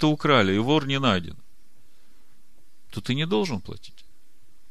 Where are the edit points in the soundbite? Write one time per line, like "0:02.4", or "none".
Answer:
none